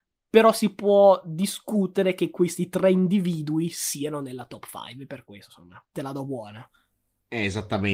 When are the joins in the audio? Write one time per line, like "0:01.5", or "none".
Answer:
0:05.9